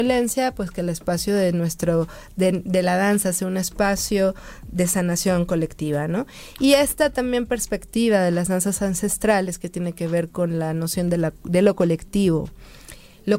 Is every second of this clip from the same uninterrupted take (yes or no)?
yes